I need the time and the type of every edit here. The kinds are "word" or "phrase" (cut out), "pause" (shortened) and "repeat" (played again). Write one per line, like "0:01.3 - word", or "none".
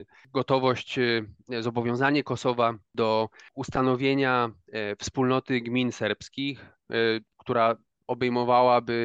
none